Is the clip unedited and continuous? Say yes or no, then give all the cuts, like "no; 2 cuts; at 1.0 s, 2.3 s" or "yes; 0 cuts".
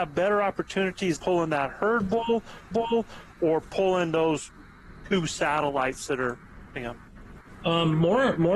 no; 3 cuts; at 1.2 s, 2.7 s, 6.8 s